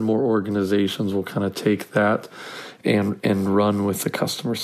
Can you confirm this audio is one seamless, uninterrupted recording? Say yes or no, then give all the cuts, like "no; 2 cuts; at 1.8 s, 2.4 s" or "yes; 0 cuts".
yes; 0 cuts